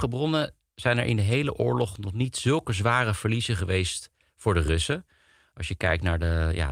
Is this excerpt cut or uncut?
uncut